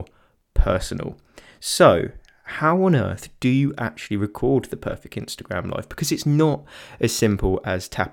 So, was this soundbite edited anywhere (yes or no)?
no